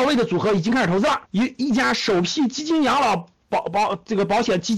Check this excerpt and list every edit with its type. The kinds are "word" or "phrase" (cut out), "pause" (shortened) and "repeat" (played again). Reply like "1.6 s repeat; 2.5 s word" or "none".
1.3 s pause